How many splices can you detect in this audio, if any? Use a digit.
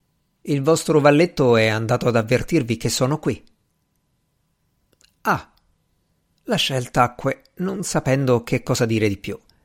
0